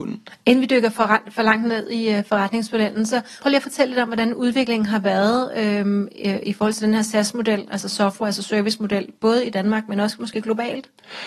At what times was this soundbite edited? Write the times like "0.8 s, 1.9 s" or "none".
3.4 s